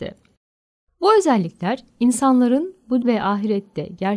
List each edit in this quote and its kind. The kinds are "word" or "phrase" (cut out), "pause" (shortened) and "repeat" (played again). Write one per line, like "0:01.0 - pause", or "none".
0:03.0 - word